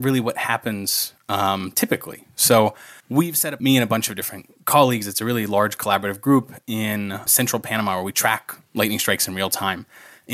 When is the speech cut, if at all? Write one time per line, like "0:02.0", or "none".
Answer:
0:03.0
0:03.6
0:07.3